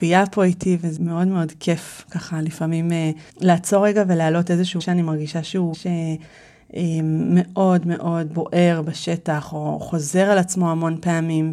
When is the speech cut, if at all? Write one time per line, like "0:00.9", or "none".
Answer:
0:01.0
0:03.3
0:04.8
0:05.7
0:08.3